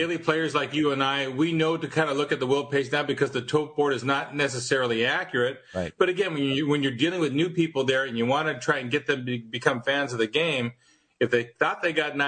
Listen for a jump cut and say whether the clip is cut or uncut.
uncut